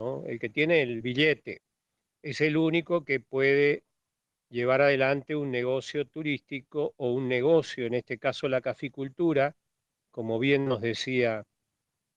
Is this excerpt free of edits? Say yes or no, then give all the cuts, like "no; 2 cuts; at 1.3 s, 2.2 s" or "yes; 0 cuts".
yes; 0 cuts